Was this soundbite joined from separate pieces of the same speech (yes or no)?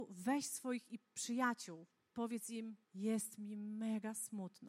yes